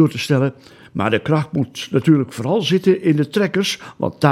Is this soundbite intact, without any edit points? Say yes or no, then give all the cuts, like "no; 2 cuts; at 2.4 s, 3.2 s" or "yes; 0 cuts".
yes; 0 cuts